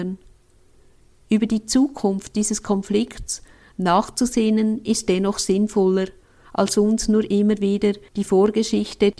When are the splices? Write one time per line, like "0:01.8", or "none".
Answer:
none